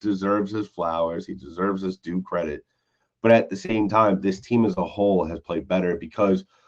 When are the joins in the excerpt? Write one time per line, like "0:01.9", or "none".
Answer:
none